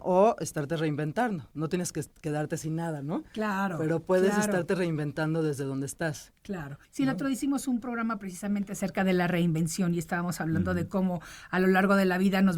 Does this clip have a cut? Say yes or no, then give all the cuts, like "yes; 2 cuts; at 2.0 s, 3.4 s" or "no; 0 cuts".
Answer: yes; 1 cut; at 6.8 s